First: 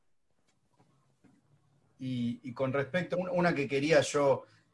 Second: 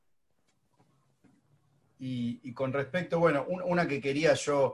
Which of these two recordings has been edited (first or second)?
first